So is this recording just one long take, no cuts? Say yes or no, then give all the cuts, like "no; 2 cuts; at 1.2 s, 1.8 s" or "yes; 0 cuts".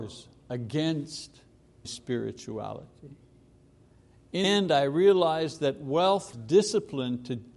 no; 3 cuts; at 1.8 s, 4.4 s, 6.3 s